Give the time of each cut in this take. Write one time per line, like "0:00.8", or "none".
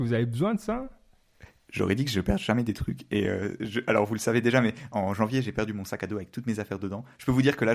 none